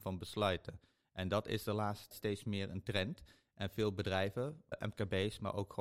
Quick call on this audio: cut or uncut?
cut